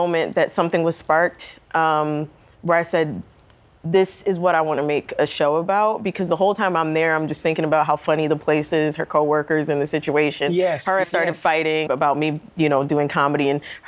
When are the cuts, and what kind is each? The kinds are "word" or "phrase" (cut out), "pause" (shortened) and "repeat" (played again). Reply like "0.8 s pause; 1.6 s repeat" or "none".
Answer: 11.0 s phrase; 11.9 s word